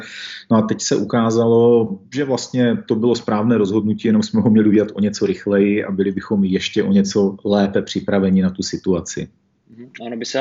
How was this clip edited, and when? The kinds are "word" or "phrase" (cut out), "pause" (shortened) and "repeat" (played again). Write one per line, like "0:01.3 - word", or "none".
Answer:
0:02.0 - pause